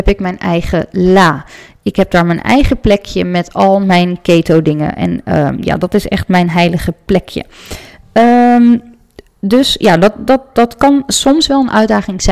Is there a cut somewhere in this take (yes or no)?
no